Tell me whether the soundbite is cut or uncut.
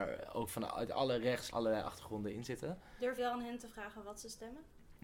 cut